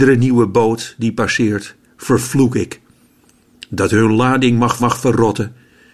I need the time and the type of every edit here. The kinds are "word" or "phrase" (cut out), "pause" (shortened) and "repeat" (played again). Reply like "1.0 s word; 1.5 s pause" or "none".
4.8 s repeat